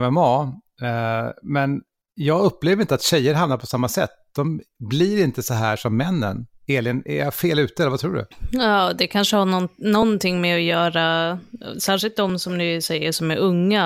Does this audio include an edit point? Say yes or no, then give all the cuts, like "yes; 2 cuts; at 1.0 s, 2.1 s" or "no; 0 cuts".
no; 0 cuts